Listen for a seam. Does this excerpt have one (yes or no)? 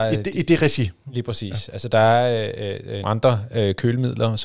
yes